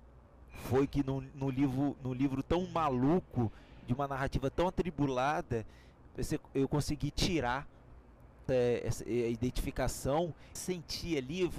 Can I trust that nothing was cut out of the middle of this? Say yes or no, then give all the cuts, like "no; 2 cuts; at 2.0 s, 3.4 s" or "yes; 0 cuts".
no; 2 cuts; at 8.5 s, 10.6 s